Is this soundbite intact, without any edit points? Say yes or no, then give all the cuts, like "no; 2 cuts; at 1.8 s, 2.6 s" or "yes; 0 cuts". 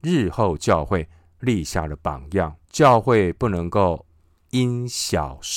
no; 1 cut; at 2.6 s